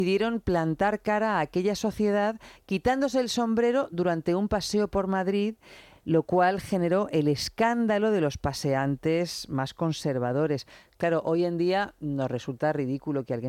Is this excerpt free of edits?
yes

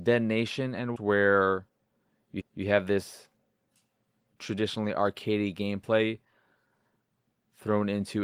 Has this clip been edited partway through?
yes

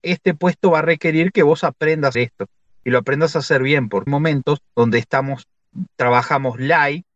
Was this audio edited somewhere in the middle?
yes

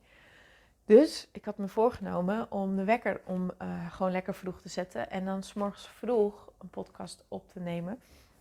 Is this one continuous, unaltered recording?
yes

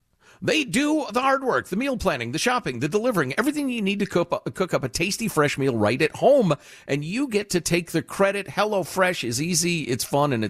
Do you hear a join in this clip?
no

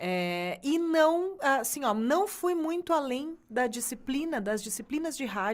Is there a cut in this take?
no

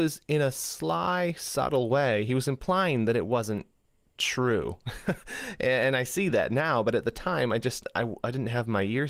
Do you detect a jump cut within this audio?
no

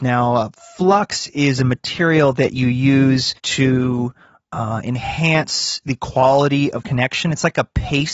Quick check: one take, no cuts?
no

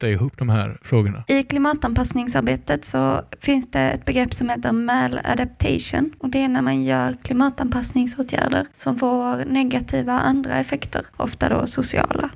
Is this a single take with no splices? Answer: yes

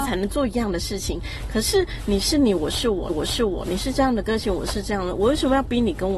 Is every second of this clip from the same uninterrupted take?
no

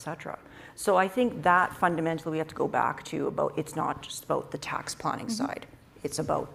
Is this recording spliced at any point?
no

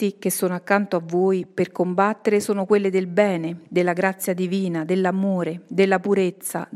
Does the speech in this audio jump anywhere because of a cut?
no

